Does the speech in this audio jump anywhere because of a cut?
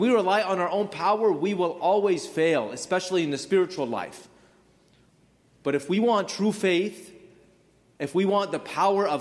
no; 0 cuts

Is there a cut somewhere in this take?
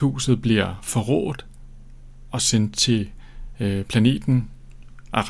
no; 0 cuts

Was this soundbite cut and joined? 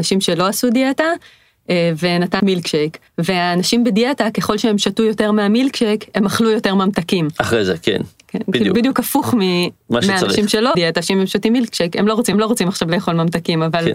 yes; 4 cuts; at 2.4 s, 3.1 s, 10.7 s, 12.3 s

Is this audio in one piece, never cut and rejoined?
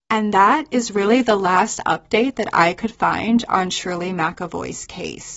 yes; 0 cuts

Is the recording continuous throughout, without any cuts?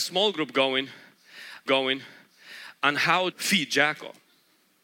no; 2 cuts; at 1.7 s, 3.3 s

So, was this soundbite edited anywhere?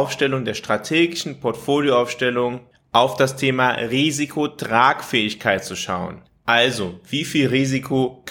no; 0 cuts

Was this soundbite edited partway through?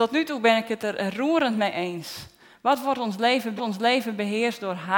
yes; 1 cut; at 3.6 s

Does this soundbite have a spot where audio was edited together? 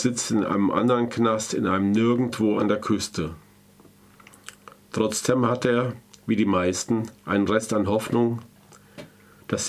no; 0 cuts

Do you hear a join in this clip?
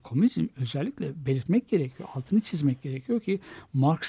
no; 0 cuts

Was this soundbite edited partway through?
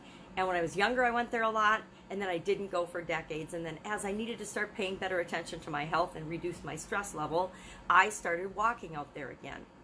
no; 0 cuts

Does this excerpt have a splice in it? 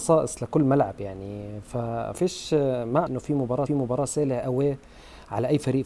yes; 3 cuts; at 2.1 s, 3.1 s, 3.7 s

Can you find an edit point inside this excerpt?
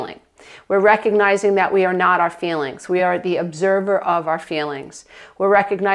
no; 0 cuts

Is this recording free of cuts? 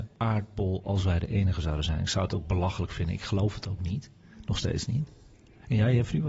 yes; 0 cuts

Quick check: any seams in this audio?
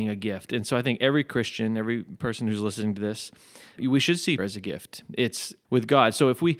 yes; 3 cuts; at 3.8 s, 4.4 s, 5.6 s

